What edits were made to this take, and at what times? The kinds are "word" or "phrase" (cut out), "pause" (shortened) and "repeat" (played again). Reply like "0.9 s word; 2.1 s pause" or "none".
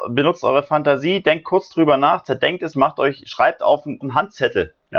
2.7 s word; 4.0 s word